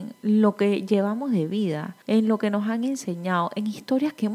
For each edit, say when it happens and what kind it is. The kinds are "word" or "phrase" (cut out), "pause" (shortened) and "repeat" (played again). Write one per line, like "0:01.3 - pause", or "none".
0:02.0 - pause